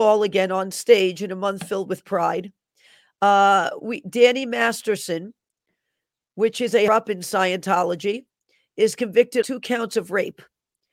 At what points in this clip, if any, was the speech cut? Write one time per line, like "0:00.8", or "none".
0:06.9
0:09.4